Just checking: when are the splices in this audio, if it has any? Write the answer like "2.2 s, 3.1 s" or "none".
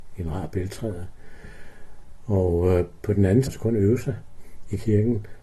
3.5 s